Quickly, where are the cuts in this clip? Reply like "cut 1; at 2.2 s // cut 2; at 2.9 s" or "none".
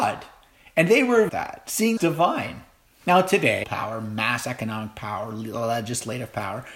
cut 1; at 1.3 s // cut 2; at 2.0 s // cut 3; at 2.9 s // cut 4; at 3.6 s